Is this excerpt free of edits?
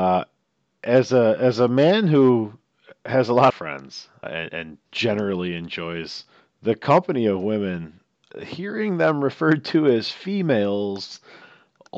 no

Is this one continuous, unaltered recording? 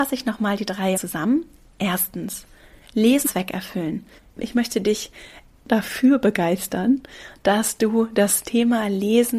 no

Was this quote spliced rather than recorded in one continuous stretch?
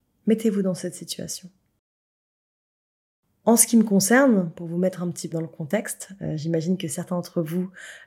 yes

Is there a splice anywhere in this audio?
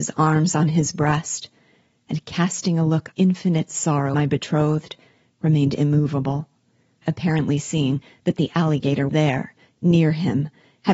yes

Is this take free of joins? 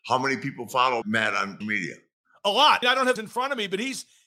no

